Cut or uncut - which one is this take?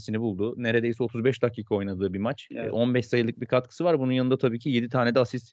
uncut